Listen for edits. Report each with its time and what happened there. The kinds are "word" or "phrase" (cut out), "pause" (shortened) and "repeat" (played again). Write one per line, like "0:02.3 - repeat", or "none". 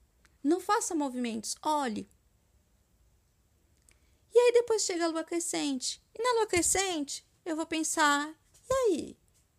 none